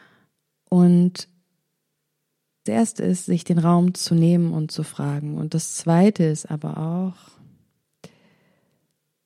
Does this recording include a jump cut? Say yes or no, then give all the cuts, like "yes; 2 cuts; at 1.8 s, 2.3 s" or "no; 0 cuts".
yes; 1 cut; at 2.7 s